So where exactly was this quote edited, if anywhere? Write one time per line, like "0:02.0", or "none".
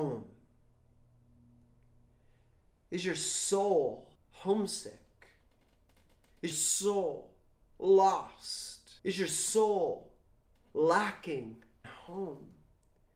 0:04.2
0:06.5
0:09.0
0:11.8